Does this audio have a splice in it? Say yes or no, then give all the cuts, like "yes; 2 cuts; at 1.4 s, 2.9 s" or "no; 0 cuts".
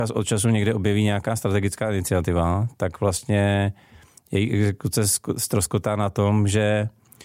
no; 0 cuts